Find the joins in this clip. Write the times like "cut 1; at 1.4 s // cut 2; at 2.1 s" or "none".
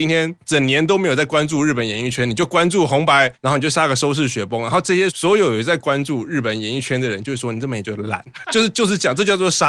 cut 1; at 8.4 s